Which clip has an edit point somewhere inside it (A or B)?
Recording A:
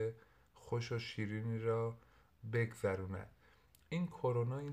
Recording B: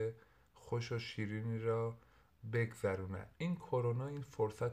B